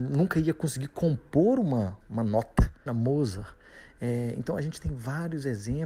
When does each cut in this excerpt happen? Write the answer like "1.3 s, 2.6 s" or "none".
2.0 s, 2.9 s